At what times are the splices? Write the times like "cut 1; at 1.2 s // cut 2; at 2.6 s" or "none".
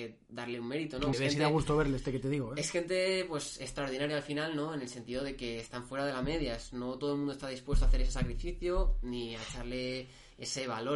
cut 1; at 1.1 s